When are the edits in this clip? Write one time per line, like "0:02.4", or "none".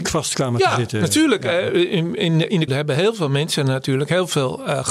0:02.7